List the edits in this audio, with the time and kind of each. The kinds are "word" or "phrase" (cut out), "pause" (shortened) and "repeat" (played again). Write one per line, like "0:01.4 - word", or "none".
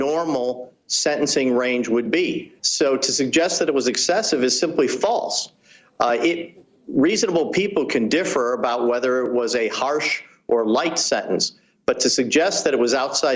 0:02.6 - pause